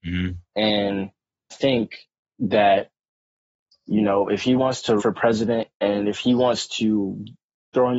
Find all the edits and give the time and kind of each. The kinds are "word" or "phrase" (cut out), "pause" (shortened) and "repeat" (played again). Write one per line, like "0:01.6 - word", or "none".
0:01.5 - word
0:02.2 - pause
0:05.0 - word